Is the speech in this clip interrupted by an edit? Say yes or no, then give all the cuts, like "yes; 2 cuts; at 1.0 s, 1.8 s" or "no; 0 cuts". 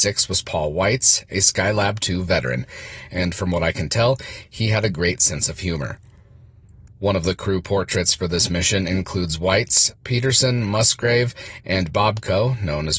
no; 0 cuts